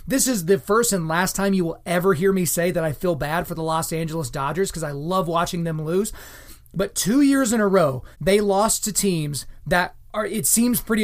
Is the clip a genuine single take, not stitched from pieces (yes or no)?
no